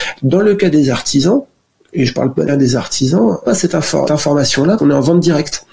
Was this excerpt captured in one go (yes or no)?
no